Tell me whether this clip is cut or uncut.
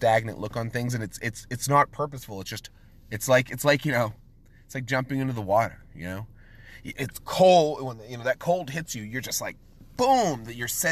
uncut